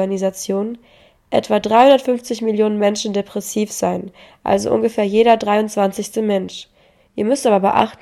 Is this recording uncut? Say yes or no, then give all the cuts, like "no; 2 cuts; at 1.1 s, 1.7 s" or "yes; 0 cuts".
yes; 0 cuts